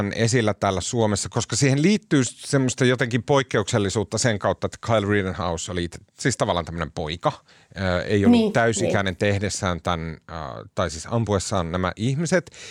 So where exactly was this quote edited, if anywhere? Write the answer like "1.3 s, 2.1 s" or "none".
6.1 s, 7.5 s